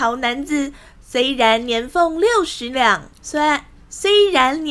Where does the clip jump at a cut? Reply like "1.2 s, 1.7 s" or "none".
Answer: 3.1 s